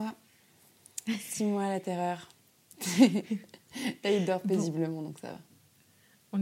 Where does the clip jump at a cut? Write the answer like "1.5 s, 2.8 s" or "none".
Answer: none